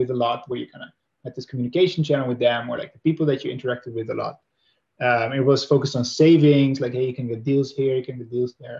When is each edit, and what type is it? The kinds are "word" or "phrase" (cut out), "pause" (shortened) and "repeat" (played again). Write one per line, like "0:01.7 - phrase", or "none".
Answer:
none

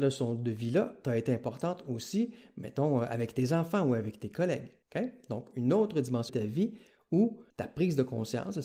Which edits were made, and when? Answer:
0:04.8 - pause
0:06.3 - word
0:07.5 - pause

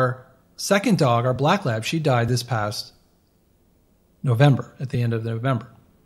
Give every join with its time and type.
none

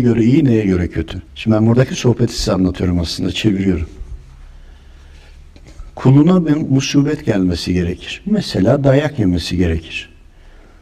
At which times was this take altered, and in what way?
0:01.3 - pause

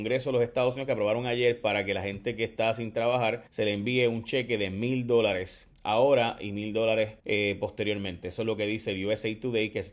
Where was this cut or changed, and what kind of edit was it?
0:03.5 - pause
0:05.7 - pause
0:07.2 - pause

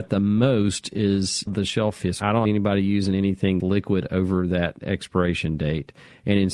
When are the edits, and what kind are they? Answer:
0:01.5 - word
0:02.0 - word
0:02.4 - word
0:03.6 - word

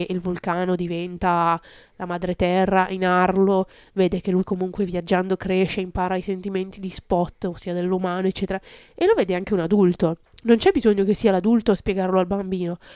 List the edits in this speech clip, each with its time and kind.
none

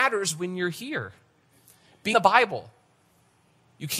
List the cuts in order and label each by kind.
0:02.1 - word

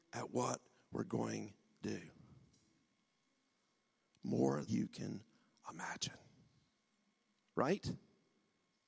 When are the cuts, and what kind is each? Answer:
0:01.8 - word
0:04.7 - word

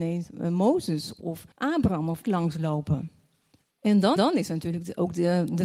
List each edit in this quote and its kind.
0:01.2 - word
0:01.5 - pause
0:02.2 - word
0:03.6 - pause
0:04.2 - repeat

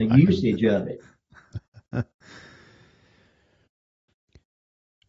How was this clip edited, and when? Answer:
none

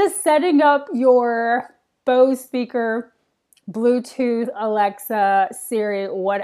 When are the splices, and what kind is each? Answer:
none

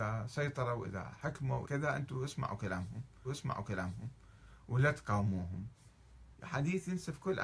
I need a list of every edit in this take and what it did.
0:01.6 - word
0:03.2 - repeat

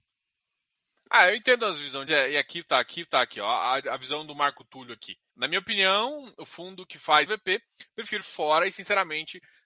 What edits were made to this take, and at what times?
0:02.1 - word
0:02.9 - repeat
0:05.3 - pause
0:07.3 - phrase
0:08.2 - word

